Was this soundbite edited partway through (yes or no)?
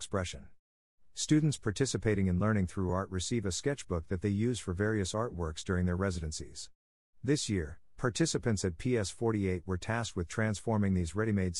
no